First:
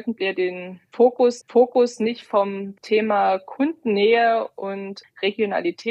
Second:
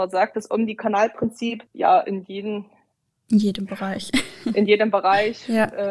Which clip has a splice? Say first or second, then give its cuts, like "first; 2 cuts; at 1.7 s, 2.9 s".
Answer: first; 1 cut; at 1.4 s